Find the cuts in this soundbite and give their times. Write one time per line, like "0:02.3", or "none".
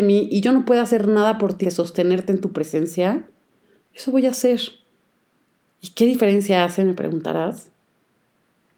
0:01.6